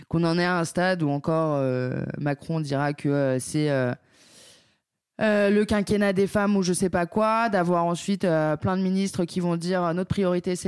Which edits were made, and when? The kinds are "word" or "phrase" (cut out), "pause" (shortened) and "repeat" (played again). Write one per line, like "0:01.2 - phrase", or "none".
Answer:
none